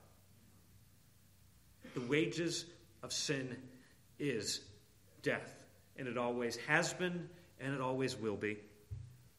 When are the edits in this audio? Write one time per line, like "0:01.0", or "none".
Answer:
none